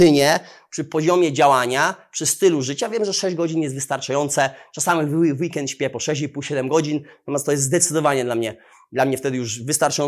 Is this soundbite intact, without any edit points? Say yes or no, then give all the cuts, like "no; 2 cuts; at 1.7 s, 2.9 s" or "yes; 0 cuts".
yes; 0 cuts